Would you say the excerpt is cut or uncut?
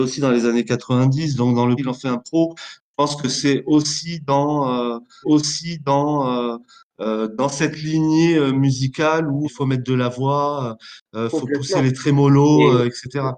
cut